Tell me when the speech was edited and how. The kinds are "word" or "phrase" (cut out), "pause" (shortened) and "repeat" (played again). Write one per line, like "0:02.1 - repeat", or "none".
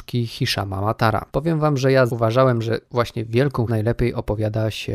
0:01.3 - pause
0:02.1 - word
0:02.9 - pause
0:03.7 - word